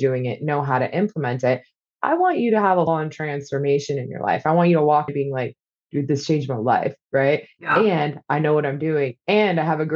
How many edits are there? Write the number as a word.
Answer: two